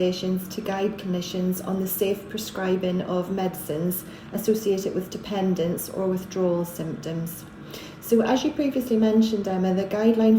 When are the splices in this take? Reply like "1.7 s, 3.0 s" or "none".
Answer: none